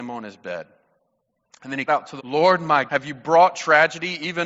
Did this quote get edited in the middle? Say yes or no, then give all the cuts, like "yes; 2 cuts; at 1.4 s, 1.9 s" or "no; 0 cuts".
yes; 3 cuts; at 1.9 s, 2.2 s, 2.9 s